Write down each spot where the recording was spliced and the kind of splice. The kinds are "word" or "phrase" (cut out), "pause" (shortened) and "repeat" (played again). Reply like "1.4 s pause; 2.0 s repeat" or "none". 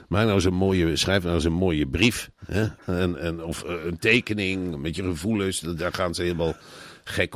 2.4 s pause